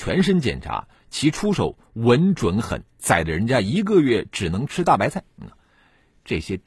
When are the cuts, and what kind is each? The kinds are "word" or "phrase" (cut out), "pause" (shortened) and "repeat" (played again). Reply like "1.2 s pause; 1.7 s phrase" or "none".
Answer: 5.3 s pause